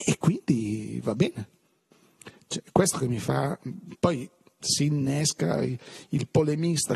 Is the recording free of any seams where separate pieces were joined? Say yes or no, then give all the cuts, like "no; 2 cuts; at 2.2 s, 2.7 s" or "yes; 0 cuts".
yes; 0 cuts